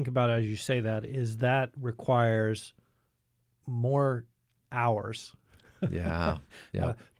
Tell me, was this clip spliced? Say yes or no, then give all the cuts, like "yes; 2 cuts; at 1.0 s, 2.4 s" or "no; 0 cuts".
no; 0 cuts